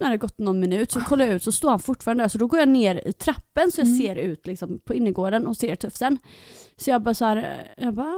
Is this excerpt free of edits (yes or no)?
yes